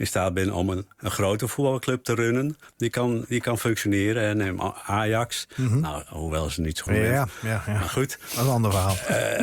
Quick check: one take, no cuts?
no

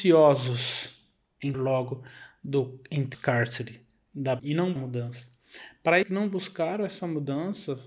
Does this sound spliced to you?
yes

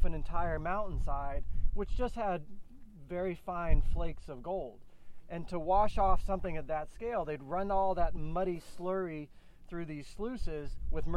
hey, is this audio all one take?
yes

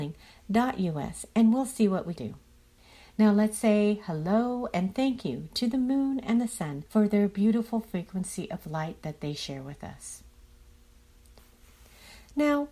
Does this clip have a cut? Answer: yes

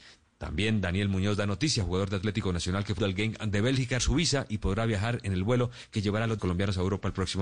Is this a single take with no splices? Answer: no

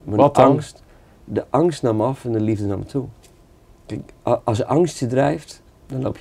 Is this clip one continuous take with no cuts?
yes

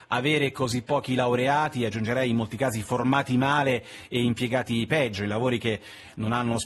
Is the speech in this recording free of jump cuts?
yes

